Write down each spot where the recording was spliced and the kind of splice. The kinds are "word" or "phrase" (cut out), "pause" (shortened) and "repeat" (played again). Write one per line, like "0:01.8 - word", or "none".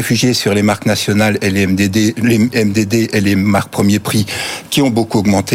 none